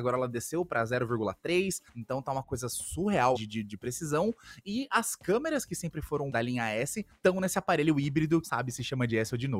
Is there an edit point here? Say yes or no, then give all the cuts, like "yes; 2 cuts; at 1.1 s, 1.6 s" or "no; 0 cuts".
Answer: yes; 5 cuts; at 1.9 s, 3.3 s, 6.3 s, 7.1 s, 8.4 s